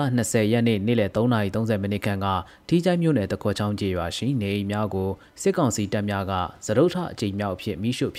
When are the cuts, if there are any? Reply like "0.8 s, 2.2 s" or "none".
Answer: none